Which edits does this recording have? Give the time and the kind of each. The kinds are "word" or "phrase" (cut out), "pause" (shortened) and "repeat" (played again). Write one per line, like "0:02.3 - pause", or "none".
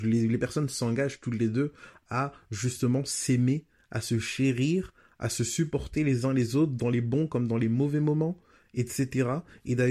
none